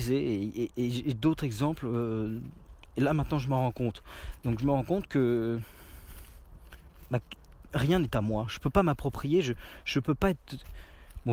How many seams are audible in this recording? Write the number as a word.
zero